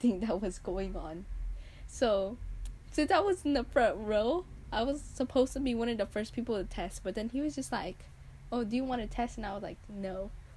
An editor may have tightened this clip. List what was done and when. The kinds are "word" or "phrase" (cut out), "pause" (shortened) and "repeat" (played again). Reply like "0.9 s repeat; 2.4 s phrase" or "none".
none